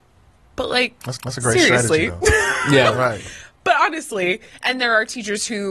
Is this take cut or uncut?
cut